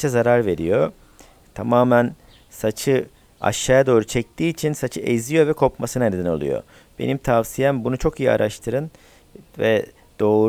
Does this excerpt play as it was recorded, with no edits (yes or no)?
yes